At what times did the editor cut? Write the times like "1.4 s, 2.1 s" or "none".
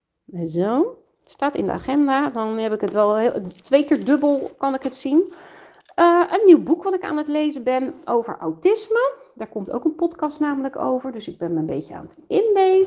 none